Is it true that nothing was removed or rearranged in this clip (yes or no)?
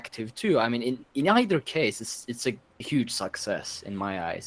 no